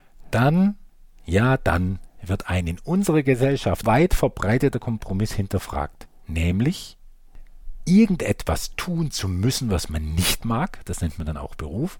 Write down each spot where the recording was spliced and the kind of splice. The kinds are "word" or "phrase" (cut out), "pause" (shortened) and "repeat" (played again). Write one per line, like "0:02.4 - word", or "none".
0:03.8 - word